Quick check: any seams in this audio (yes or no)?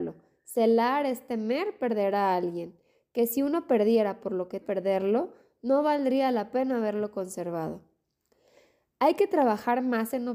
yes